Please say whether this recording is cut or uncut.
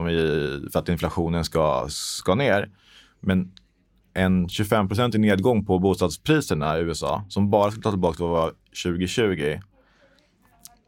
uncut